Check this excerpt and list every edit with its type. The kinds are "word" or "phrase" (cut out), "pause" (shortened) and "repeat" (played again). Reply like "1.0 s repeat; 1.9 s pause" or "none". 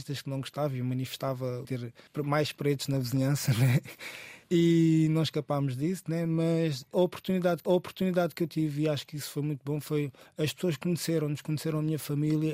1.6 s phrase; 4.4 s pause; 7.6 s repeat